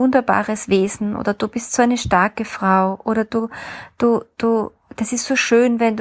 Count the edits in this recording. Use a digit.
0